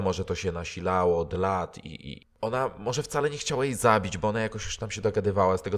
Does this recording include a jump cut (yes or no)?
no